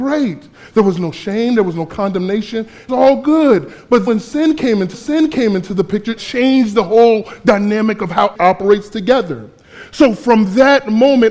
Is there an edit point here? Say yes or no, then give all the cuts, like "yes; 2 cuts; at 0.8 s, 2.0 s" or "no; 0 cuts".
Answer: yes; 5 cuts; at 2.9 s, 4.1 s, 4.9 s, 6.2 s, 8.4 s